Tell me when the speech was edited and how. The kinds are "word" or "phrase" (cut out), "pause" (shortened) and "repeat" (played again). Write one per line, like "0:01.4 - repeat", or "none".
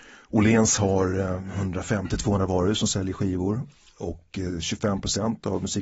none